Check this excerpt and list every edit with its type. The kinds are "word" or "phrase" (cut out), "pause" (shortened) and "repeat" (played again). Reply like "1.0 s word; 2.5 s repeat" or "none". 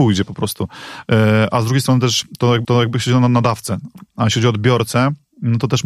2.6 s repeat